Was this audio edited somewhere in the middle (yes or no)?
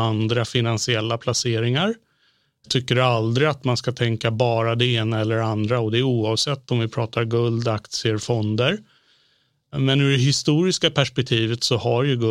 no